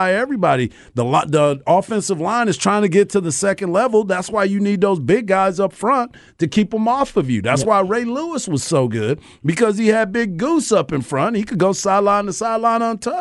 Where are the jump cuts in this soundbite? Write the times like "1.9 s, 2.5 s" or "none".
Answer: none

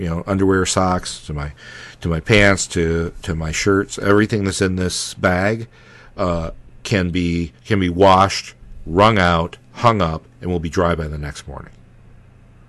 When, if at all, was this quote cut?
7.6 s, 9.6 s

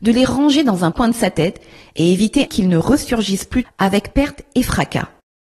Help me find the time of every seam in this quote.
0.9 s, 2.5 s, 3.6 s

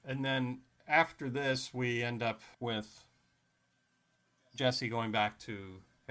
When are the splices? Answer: 2.5 s

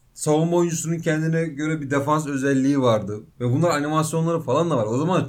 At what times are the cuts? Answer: none

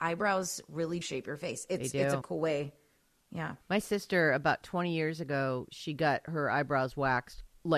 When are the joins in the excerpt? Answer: 1.0 s, 2.2 s, 3.6 s

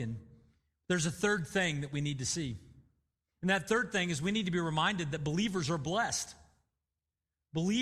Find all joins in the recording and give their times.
none

